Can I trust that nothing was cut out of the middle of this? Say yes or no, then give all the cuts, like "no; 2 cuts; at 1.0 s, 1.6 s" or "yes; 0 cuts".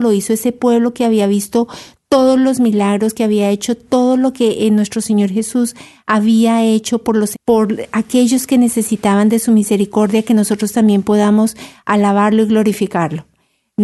no; 1 cut; at 7.3 s